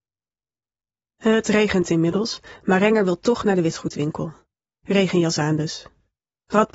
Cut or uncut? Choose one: uncut